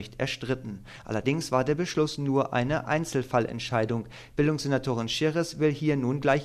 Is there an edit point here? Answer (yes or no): no